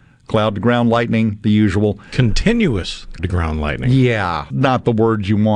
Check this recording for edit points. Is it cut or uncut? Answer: cut